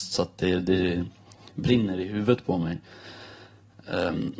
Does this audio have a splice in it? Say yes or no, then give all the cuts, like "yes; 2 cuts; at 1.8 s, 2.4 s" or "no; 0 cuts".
no; 0 cuts